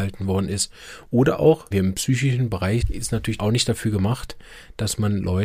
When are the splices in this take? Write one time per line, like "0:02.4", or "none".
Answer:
0:01.7
0:02.8
0:03.4